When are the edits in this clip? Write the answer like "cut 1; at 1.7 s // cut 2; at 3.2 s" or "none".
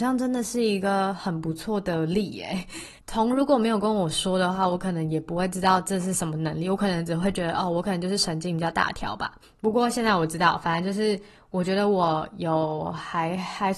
cut 1; at 3.0 s // cut 2; at 9.4 s